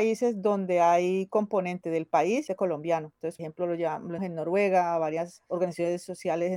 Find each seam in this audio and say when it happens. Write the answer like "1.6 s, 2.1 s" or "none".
2.5 s, 3.4 s, 4.2 s